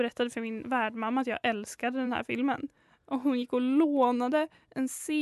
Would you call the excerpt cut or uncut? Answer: uncut